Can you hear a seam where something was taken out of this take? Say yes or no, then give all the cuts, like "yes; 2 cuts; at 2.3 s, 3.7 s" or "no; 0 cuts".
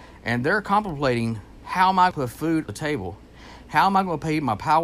yes; 2 cuts; at 2.1 s, 2.7 s